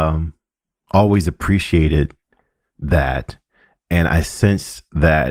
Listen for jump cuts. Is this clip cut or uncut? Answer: uncut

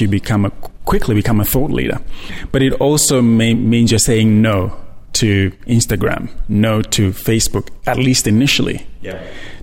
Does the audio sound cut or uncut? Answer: uncut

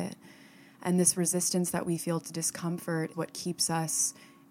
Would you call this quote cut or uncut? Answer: cut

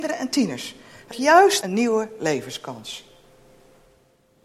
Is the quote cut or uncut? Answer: cut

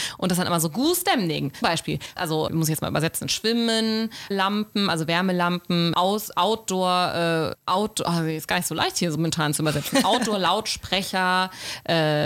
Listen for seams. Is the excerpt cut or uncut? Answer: cut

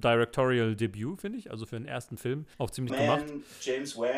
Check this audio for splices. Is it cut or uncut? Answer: cut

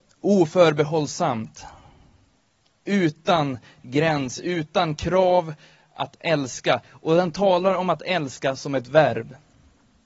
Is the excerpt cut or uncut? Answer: uncut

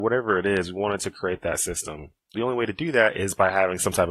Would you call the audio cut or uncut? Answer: cut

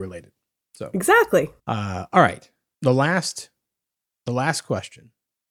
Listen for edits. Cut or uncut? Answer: cut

